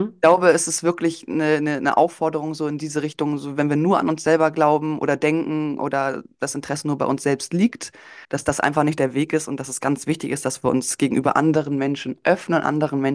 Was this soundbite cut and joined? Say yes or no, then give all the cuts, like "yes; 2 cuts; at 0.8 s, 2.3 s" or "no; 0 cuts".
yes; 1 cut; at 8.2 s